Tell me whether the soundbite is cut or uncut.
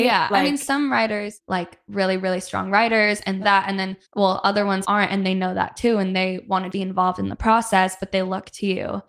cut